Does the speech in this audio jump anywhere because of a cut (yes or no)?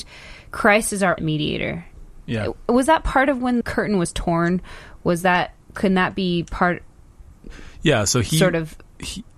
yes